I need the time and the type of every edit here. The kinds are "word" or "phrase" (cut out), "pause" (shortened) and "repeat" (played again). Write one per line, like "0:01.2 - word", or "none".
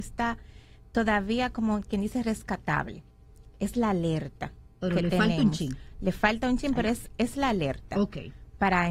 none